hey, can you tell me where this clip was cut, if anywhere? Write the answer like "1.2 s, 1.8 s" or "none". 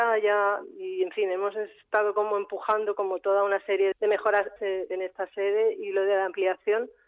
3.9 s, 4.6 s